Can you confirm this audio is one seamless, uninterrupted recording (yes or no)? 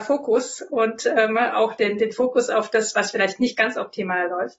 yes